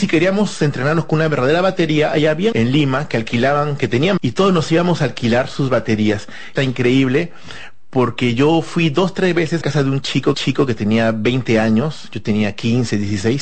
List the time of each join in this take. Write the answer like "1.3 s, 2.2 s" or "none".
2.5 s, 4.2 s, 6.6 s, 9.6 s, 10.3 s

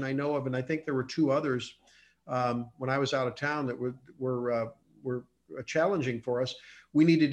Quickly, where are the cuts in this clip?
none

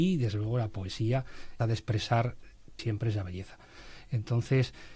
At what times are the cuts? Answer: 1.6 s, 2.8 s

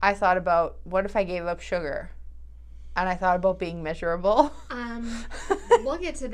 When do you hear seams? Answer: none

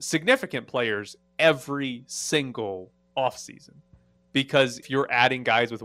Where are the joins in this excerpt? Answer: 4.8 s

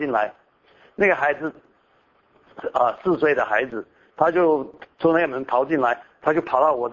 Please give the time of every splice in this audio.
none

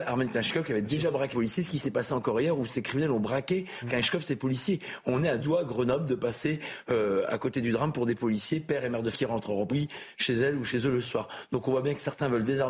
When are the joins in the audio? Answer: 1.3 s, 3.9 s, 5.4 s, 9.1 s, 9.7 s

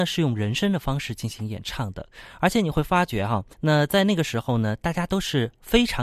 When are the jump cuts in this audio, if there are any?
3.5 s

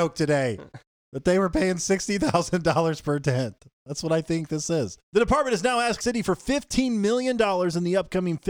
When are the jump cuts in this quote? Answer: 0.9 s, 5.0 s, 6.0 s

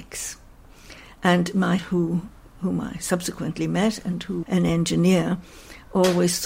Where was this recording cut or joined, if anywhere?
1.8 s, 4.4 s

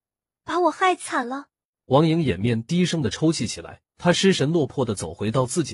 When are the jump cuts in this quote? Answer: 1.7 s, 3.9 s

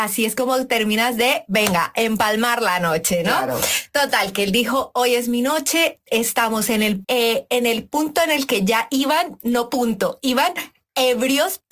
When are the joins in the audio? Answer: 7.0 s

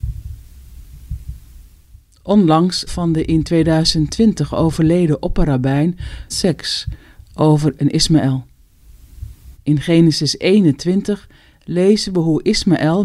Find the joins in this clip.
2.9 s, 6.3 s, 7.8 s, 9.5 s

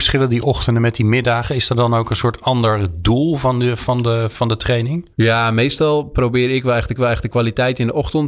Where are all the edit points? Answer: 5.1 s, 7.0 s

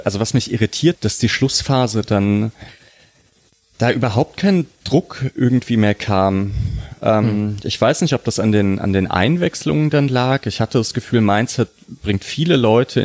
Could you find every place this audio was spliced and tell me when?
0.9 s

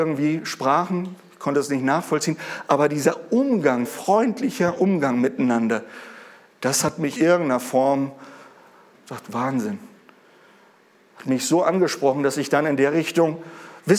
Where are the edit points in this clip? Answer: 3.8 s, 7.2 s, 8.9 s

